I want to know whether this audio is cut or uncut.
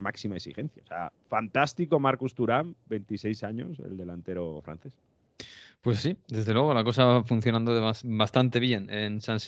uncut